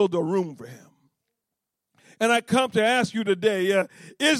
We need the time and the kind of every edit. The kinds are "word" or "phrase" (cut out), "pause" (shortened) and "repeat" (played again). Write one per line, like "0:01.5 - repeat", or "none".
none